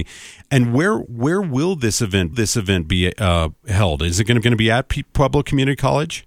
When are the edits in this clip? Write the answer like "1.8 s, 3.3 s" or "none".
2.3 s, 4.4 s